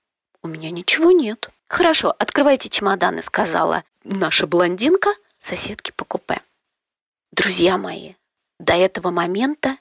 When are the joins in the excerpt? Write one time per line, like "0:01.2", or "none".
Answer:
0:01.6